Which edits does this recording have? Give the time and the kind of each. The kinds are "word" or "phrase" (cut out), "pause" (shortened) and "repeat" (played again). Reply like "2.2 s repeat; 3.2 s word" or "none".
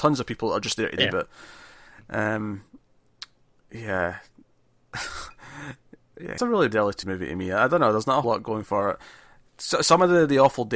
1.0 s word; 6.4 s word; 6.7 s word; 7.0 s word; 8.2 s word